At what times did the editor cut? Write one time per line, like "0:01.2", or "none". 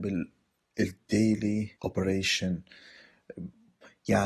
0:01.8